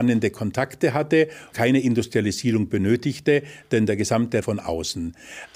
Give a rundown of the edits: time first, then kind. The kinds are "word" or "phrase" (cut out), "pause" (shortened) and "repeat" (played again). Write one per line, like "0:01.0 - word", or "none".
0:01.5 - word
0:04.4 - phrase